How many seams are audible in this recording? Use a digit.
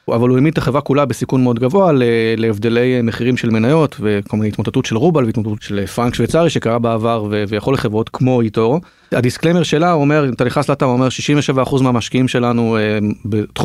1